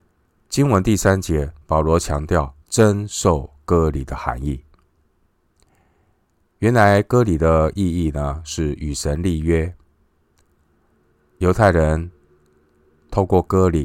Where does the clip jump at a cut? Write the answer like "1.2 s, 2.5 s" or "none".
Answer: 1.6 s, 2.6 s